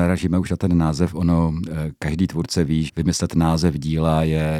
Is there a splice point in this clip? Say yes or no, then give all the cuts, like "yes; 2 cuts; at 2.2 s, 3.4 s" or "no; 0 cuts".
yes; 1 cut; at 2.9 s